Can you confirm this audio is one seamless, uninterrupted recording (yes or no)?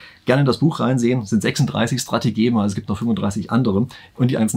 yes